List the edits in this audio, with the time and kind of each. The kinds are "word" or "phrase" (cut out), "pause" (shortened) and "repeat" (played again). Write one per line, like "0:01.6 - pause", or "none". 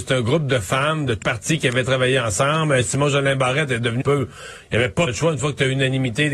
0:01.2 - word
0:04.0 - word
0:05.1 - word